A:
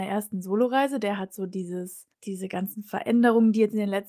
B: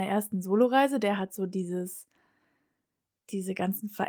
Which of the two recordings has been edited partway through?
A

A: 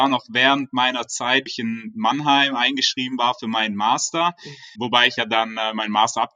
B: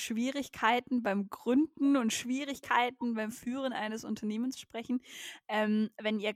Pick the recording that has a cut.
A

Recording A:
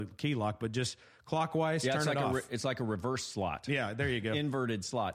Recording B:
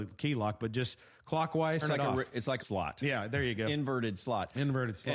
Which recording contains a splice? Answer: B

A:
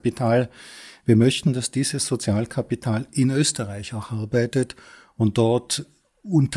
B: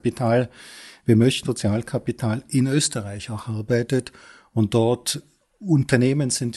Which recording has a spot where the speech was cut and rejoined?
B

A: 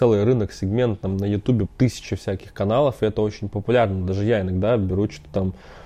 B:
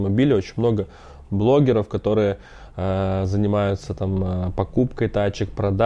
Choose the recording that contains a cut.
A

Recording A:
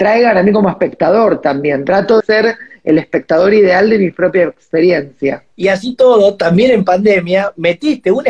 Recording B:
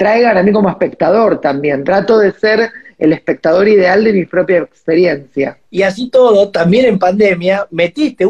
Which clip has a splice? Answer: A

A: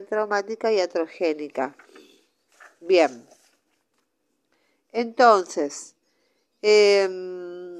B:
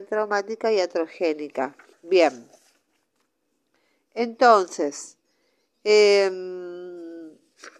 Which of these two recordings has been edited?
B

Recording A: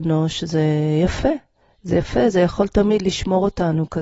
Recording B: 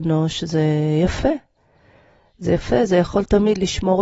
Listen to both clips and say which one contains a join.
A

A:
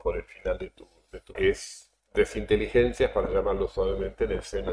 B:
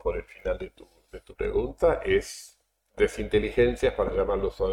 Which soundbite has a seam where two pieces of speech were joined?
A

